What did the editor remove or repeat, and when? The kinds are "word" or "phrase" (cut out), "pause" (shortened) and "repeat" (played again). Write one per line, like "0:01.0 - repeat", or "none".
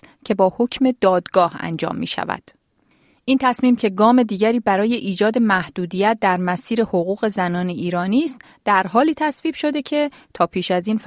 none